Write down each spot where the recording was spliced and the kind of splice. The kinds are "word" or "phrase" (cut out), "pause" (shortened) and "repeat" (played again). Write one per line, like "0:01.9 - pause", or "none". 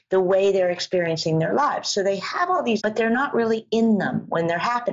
0:02.8 - word